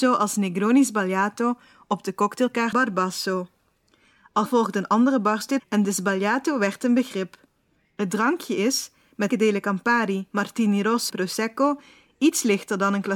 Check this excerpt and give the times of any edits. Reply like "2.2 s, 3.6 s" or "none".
2.7 s, 4.5 s, 5.6 s, 9.3 s, 11.1 s